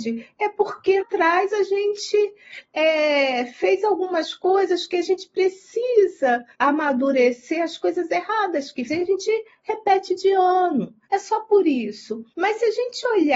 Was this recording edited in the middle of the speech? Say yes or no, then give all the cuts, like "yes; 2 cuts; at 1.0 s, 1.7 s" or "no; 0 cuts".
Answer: yes; 5 cuts; at 1.0 s, 6.5 s, 8.9 s, 11.0 s, 12.3 s